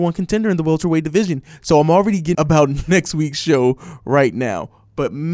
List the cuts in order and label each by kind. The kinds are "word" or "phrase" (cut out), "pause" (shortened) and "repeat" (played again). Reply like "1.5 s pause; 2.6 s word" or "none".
2.3 s word